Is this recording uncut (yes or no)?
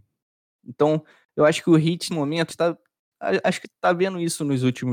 no